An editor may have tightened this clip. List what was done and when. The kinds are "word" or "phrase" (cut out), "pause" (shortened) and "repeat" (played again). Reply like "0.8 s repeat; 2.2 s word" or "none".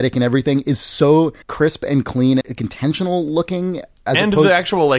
1.4 s pause; 2.4 s word